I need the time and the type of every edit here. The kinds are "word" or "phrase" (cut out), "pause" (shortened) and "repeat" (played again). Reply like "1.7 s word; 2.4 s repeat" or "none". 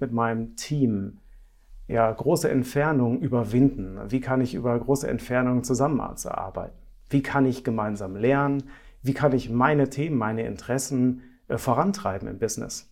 none